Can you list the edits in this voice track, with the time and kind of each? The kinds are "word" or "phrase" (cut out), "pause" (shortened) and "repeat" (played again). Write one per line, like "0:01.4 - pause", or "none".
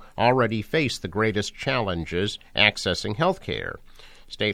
none